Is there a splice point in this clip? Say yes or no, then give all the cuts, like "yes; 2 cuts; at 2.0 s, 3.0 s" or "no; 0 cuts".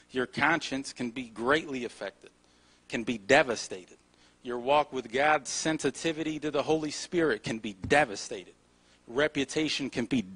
no; 0 cuts